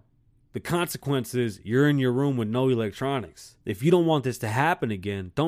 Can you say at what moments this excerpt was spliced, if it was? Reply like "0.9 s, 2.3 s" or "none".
3.6 s